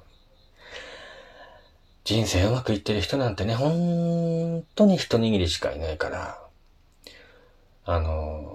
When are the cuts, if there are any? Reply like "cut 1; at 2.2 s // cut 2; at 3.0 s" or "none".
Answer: none